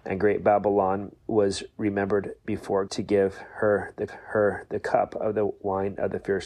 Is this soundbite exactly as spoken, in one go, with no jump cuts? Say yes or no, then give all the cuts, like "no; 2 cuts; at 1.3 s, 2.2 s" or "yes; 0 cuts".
no; 3 cuts; at 1.2 s, 2.9 s, 4.1 s